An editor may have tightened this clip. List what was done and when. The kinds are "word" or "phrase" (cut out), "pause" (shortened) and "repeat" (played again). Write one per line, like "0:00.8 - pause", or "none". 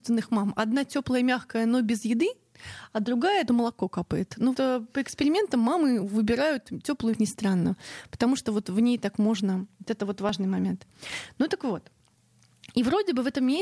0:03.5 - phrase
0:04.5 - word
0:07.1 - phrase